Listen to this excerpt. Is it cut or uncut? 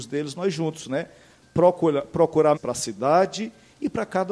cut